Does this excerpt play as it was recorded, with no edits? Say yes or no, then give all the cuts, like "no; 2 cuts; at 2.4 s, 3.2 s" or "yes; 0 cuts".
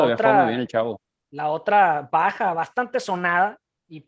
yes; 0 cuts